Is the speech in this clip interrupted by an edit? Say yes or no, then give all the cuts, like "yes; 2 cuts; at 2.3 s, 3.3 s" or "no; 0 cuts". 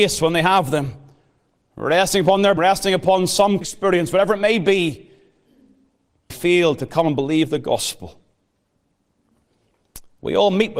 yes; 3 cuts; at 2.6 s, 3.6 s, 6.3 s